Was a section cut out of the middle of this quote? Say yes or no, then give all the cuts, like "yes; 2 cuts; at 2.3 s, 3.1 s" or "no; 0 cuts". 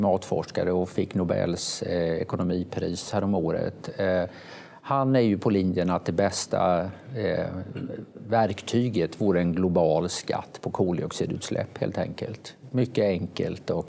no; 0 cuts